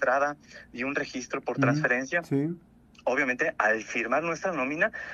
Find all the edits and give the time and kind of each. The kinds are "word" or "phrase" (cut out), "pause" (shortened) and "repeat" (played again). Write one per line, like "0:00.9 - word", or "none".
none